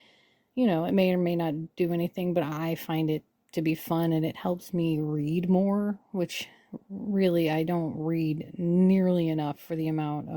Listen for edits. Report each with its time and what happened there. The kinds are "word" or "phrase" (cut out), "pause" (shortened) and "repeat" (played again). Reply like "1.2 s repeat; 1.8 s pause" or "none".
none